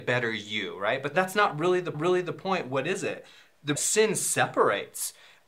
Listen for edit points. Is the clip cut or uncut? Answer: cut